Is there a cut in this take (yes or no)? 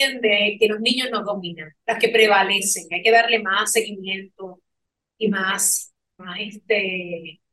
yes